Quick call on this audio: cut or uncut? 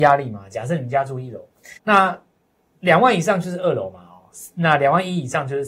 cut